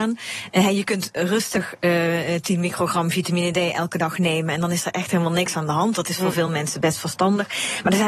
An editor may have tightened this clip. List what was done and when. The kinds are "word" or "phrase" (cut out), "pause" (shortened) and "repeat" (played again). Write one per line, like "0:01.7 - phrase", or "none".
none